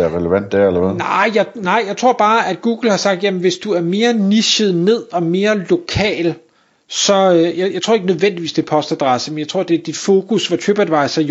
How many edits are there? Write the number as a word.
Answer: zero